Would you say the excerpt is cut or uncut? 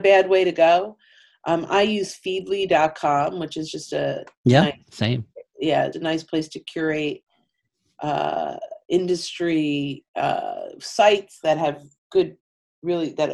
cut